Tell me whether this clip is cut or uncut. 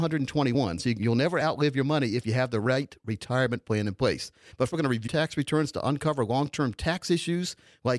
cut